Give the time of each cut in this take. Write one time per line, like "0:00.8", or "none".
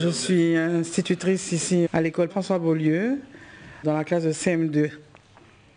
0:01.9
0:02.3
0:03.8